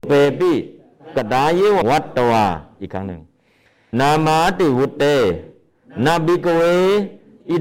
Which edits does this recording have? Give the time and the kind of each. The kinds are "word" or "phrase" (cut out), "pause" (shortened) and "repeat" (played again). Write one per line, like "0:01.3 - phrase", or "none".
0:01.8 - word
0:03.9 - word